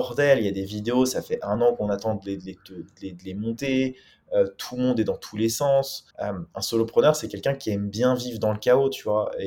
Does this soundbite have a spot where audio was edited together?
yes; 1 cut; at 6.1 s

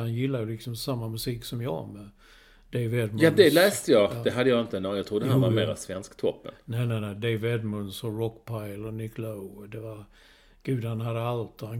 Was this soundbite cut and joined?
no; 0 cuts

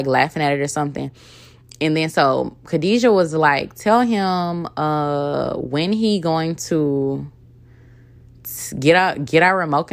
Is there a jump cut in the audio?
no; 0 cuts

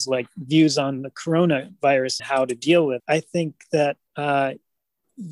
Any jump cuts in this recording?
yes; 3 cuts; at 2.2 s, 3.0 s, 4.1 s

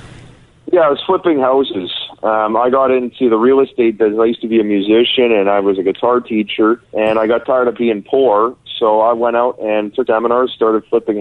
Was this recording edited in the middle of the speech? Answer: yes; 2 cuts; at 6.8 s, 10.1 s

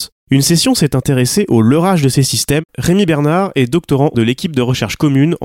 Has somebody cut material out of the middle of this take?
yes; 2 cuts; at 2.7 s, 4.1 s

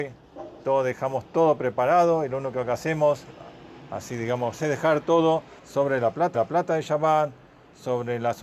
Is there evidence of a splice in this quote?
yes; 3 cuts; at 4.6 s, 5.6 s, 6.3 s

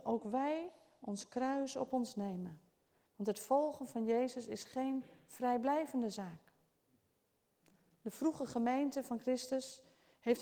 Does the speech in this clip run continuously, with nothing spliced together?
yes; 0 cuts

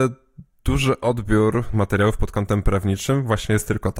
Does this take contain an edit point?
yes; 1 cut; at 1.7 s

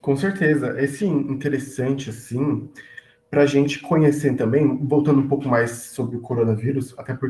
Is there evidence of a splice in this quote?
yes; 1 cut; at 1.0 s

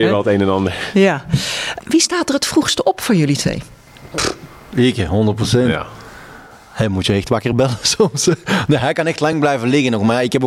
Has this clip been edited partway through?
no; 0 cuts

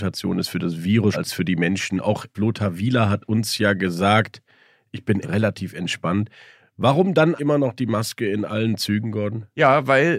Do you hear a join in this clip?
yes; 4 cuts; at 1.1 s, 2.3 s, 5.2 s, 7.4 s

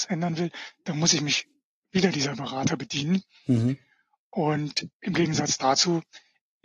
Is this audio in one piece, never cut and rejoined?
yes; 0 cuts

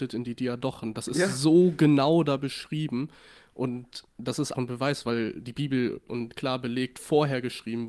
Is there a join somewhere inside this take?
yes; 2 cuts; at 4.5 s, 6.1 s

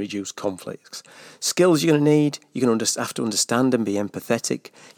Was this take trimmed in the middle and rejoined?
no; 0 cuts

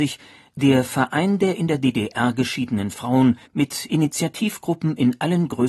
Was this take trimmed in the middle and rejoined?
yes; 1 cut; at 3.5 s

